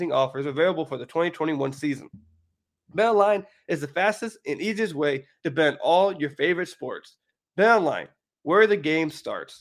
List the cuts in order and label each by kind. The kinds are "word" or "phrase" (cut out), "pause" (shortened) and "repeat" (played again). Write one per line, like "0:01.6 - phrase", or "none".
none